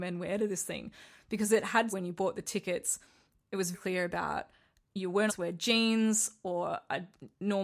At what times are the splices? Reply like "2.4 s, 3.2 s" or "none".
1.9 s, 3.7 s, 5.3 s